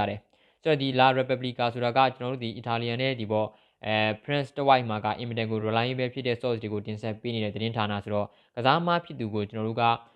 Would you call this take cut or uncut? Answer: uncut